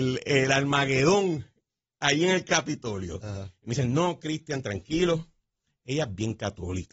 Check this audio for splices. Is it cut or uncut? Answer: uncut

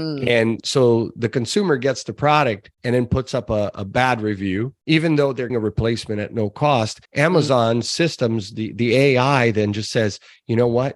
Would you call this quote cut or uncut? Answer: cut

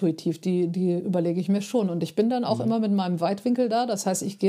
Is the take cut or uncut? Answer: uncut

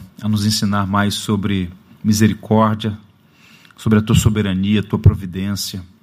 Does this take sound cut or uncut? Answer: uncut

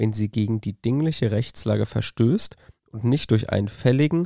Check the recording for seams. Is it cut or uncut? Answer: uncut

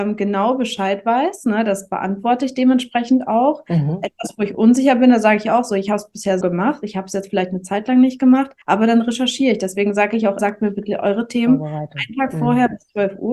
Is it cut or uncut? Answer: cut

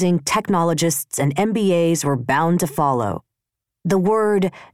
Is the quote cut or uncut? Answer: uncut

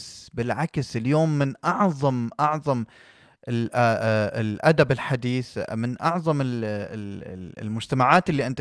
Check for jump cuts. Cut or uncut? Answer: uncut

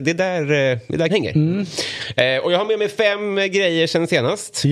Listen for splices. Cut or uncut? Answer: cut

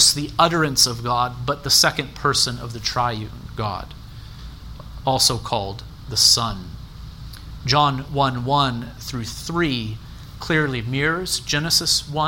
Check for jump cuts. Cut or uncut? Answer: uncut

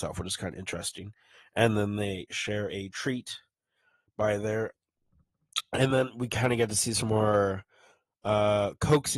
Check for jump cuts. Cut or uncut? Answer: uncut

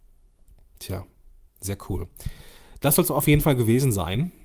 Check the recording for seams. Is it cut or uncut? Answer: uncut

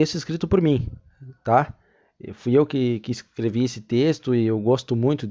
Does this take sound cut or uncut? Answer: uncut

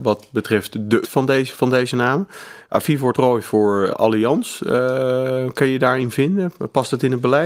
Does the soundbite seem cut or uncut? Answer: cut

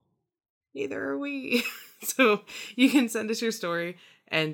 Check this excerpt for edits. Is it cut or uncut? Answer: uncut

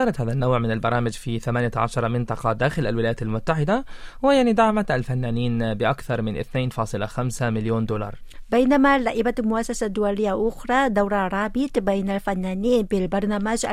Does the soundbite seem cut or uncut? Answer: uncut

